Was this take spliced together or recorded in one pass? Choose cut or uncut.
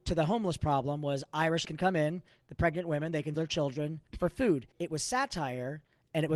cut